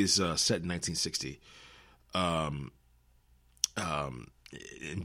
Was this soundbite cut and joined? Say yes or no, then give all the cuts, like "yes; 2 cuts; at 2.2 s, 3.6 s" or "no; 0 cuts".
no; 0 cuts